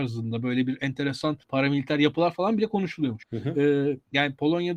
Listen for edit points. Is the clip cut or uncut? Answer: uncut